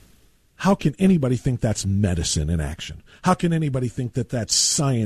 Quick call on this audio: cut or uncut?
uncut